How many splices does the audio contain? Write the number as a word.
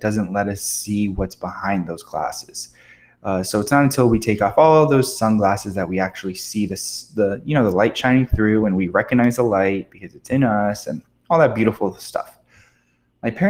zero